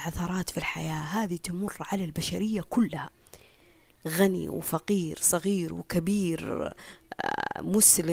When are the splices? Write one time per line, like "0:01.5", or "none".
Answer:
none

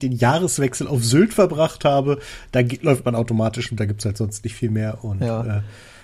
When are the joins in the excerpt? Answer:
0:03.8

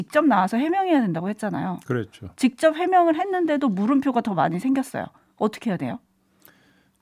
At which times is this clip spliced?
none

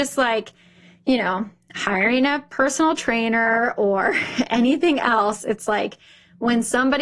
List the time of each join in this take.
none

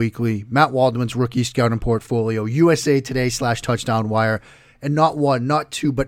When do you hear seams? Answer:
none

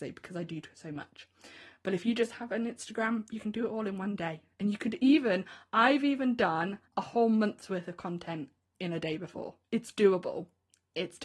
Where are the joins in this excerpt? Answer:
0:06.9
0:09.6

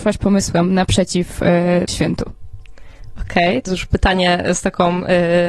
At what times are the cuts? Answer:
0:01.9
0:03.7

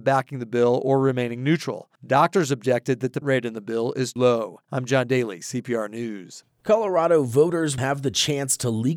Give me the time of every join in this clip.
0:02.0
0:03.2
0:04.2
0:04.6
0:07.8

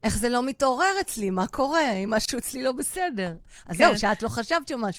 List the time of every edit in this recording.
none

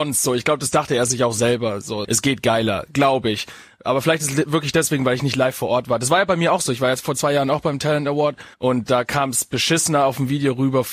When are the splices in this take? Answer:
0:02.0
0:08.5

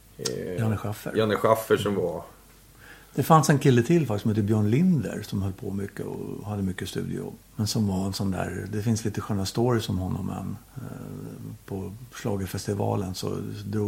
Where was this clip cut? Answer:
0:07.5
0:10.6

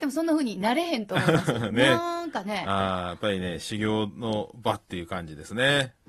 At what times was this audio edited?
none

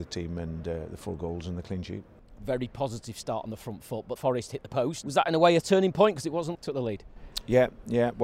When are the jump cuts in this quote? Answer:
0:04.2
0:05.0
0:06.5

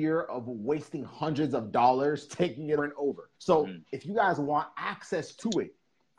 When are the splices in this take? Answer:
0:02.8
0:03.3

